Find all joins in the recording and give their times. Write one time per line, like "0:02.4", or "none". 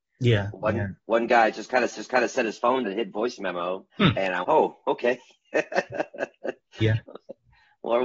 0:01.9
0:02.8
0:03.9
0:04.4